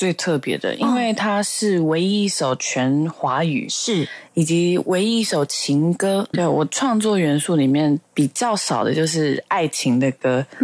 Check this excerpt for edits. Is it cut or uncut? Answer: cut